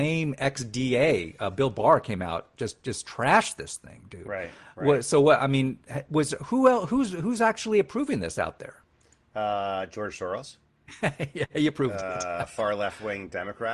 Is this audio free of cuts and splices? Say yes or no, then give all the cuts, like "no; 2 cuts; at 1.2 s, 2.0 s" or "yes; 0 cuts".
yes; 0 cuts